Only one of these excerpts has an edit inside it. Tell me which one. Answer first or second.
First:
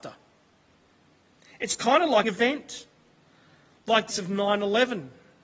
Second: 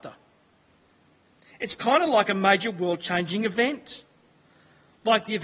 first